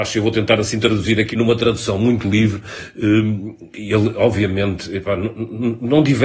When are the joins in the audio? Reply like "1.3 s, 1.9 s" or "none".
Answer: 1.3 s